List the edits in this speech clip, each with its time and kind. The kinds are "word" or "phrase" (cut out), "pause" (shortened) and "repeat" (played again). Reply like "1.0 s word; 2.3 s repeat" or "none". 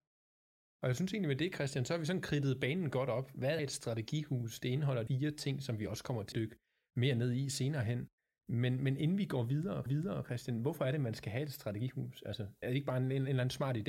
3.6 s word; 5.1 s word; 6.3 s word; 9.9 s repeat; 12.6 s word